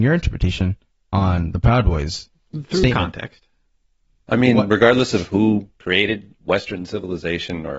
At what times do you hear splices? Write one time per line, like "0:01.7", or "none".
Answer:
none